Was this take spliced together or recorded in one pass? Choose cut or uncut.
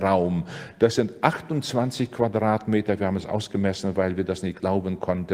uncut